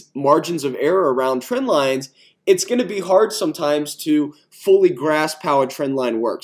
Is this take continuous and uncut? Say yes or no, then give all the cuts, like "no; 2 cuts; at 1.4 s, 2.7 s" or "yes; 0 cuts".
yes; 0 cuts